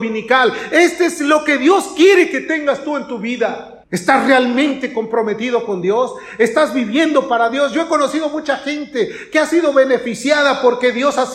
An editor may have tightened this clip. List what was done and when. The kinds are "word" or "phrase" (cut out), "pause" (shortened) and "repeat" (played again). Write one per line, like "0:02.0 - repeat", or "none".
0:03.8 - pause